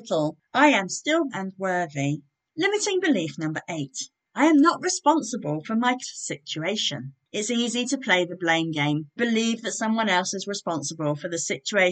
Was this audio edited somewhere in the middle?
yes; 3 cuts; at 1.3 s, 6.0 s, 9.2 s

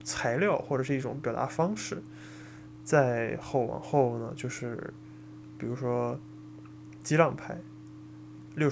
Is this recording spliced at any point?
no; 0 cuts

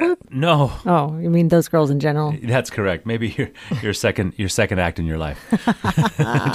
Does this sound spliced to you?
no; 0 cuts

